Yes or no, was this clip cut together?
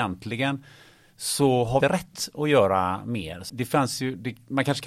yes